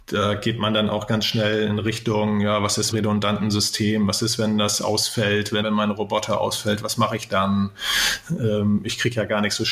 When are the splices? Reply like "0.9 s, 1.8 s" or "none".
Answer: 2.9 s, 5.6 s